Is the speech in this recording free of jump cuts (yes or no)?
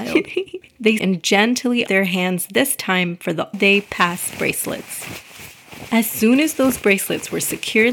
no